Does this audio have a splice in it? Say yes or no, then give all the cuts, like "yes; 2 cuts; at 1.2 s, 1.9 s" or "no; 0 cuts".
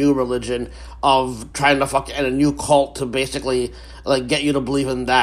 no; 0 cuts